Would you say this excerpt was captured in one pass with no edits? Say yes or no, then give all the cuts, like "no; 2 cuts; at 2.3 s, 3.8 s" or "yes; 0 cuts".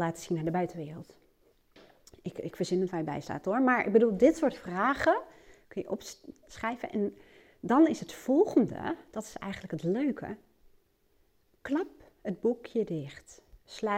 yes; 0 cuts